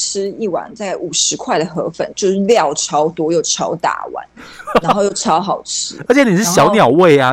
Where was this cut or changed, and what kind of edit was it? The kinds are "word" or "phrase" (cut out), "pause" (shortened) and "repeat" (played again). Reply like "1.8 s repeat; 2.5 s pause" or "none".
4.8 s word